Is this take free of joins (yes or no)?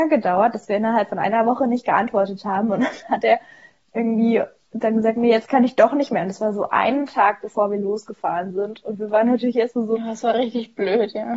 yes